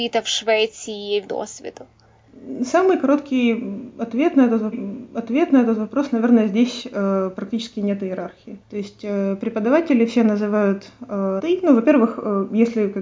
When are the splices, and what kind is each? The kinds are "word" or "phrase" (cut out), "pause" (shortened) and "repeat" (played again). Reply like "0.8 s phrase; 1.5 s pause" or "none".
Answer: 1.3 s phrase; 4.7 s repeat; 8.6 s pause; 11.4 s word